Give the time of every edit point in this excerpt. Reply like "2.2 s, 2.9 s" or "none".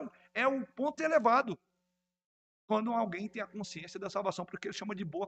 1.0 s